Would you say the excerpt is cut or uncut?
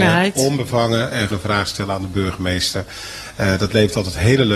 cut